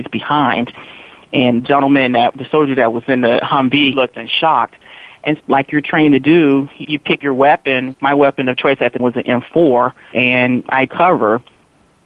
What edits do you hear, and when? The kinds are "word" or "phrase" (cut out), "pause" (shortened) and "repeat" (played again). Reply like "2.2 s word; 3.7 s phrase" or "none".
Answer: 1.6 s word; 3.9 s word; 5.4 s word; 6.8 s word; 7.2 s word; 7.9 s word; 9.0 s word; 10.1 s word; 10.9 s word